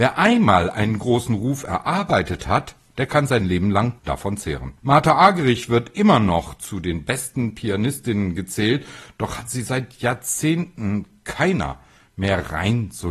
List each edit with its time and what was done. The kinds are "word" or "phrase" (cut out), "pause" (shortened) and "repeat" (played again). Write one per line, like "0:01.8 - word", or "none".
0:04.0 - pause
0:04.8 - pause